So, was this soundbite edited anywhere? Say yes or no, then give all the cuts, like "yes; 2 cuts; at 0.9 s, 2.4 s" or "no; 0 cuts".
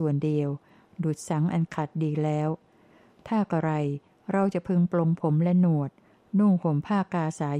no; 0 cuts